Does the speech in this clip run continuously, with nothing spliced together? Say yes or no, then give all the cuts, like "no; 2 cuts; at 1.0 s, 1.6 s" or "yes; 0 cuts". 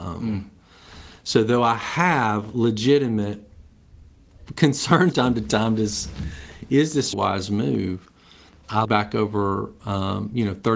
no; 3 cuts; at 5.1 s, 7.1 s, 8.8 s